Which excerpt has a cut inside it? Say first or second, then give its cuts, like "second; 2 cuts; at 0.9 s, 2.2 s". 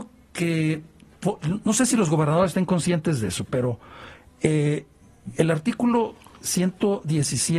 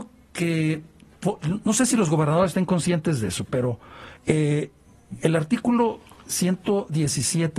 second; 1 cut; at 4.2 s